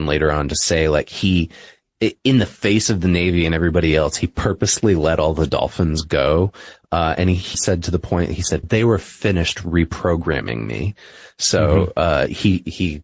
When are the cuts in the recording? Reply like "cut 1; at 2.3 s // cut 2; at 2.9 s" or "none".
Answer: cut 1; at 7.5 s // cut 2; at 8.6 s